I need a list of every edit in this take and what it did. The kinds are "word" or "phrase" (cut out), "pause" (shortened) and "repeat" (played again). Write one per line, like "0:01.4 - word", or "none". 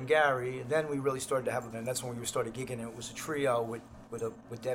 0:01.7 - word

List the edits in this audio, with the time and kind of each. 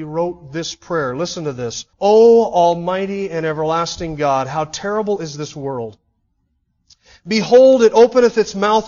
0:01.9 - pause

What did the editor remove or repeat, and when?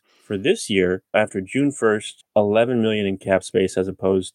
0:01.1 - phrase
0:02.3 - phrase

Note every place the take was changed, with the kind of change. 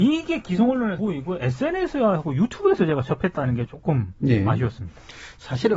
0:01.0 - word

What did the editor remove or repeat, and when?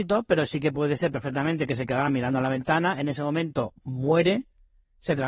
none

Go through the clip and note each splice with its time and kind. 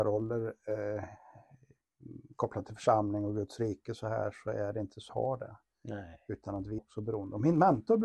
0:05.1 - phrase
0:06.8 - word

